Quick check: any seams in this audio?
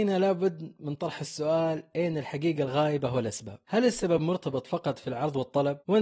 no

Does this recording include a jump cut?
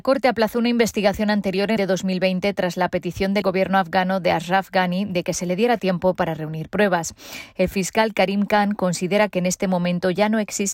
yes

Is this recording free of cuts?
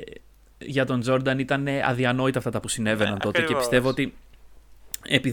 no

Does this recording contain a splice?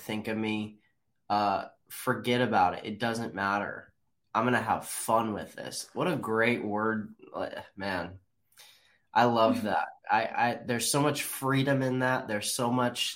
no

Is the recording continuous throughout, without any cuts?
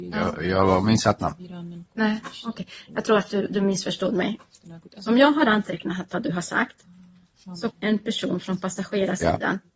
no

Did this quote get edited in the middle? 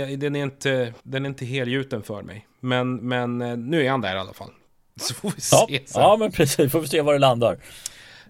yes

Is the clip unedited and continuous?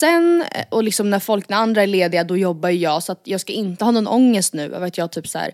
yes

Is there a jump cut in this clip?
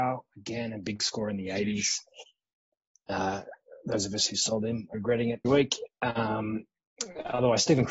yes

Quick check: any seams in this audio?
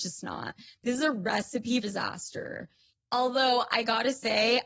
yes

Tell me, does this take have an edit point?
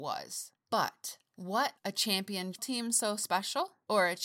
yes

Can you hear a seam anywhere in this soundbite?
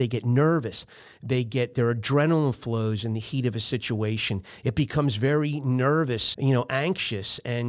yes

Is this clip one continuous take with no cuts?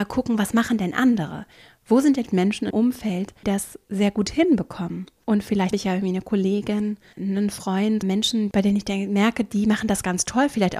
no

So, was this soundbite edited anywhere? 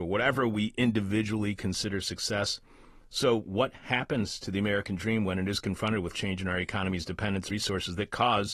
yes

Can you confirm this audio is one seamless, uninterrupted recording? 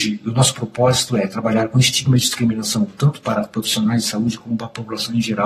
yes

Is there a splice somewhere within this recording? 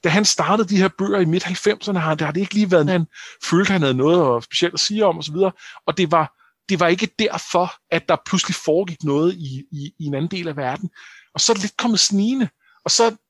yes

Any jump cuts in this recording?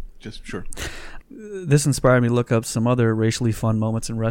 yes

